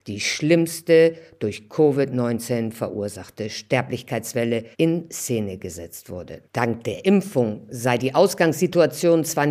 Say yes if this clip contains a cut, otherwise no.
yes